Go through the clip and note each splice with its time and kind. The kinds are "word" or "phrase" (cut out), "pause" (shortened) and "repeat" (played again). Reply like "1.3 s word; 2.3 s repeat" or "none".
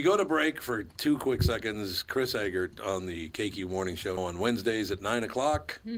4.2 s word